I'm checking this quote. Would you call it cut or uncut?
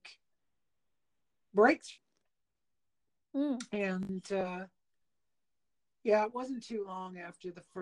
uncut